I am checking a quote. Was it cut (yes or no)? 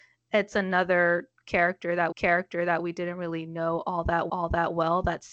yes